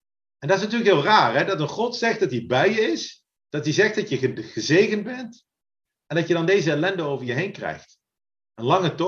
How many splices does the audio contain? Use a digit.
0